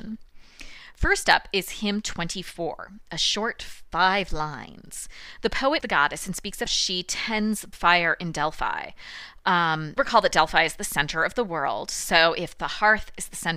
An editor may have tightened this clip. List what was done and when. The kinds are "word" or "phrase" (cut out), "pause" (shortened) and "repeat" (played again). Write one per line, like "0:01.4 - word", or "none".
0:05.8 - word
0:06.7 - word
0:07.7 - word
0:10.0 - word